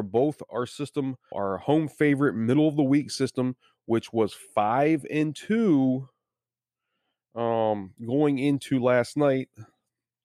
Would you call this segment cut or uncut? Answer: cut